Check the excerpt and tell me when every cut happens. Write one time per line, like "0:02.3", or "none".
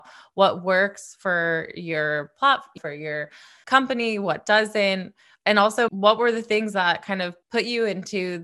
0:02.8
0:03.6
0:05.9
0:07.4